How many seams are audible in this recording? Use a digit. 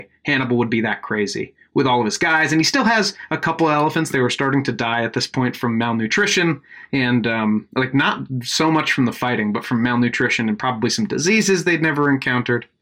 0